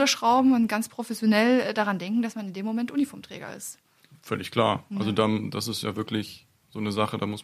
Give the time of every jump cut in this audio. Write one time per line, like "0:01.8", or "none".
none